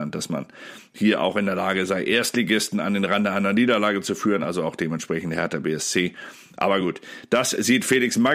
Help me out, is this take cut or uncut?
uncut